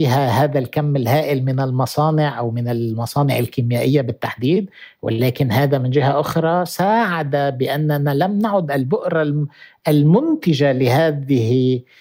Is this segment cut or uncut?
uncut